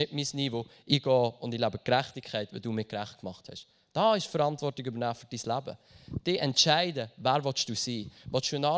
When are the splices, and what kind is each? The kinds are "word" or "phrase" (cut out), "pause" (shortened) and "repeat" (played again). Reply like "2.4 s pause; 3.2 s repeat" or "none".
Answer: none